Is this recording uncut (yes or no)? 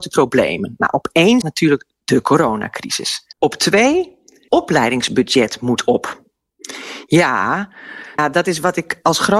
no